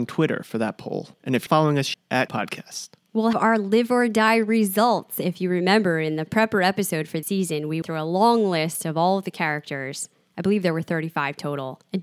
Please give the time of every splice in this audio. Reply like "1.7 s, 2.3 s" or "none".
1.5 s, 1.9 s, 2.3 s, 3.3 s, 7.2 s, 7.8 s